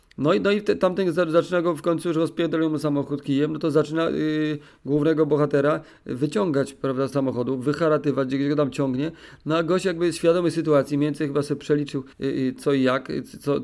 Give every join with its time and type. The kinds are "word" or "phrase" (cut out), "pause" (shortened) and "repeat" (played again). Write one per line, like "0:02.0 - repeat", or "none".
0:07.1 - word
0:12.1 - pause